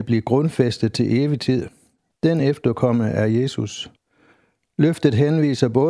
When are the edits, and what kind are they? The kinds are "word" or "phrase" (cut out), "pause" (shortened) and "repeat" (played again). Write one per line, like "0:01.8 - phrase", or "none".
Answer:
none